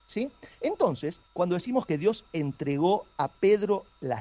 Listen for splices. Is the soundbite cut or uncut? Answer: cut